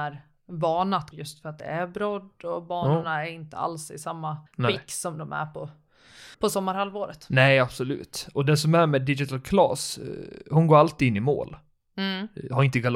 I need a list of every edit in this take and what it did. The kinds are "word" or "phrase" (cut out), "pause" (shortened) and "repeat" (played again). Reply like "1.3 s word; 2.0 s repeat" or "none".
1.1 s phrase; 4.5 s pause; 6.3 s pause